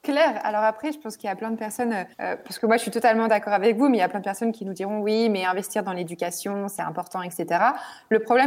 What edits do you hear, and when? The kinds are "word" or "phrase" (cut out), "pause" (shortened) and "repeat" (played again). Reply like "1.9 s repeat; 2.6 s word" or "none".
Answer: 2.1 s pause

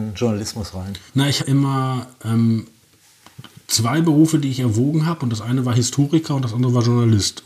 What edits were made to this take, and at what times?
1.1 s pause; 1.4 s word

